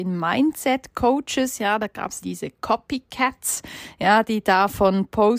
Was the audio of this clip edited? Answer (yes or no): yes